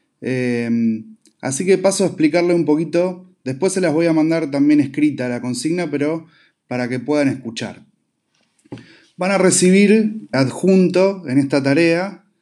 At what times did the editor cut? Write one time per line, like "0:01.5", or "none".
0:10.3